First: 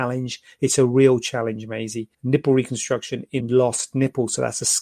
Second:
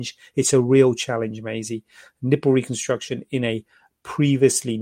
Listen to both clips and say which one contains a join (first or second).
first